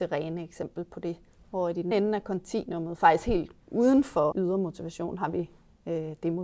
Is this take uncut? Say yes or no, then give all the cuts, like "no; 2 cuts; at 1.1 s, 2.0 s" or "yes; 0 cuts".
no; 4 cuts; at 1.3 s, 1.9 s, 3.6 s, 4.3 s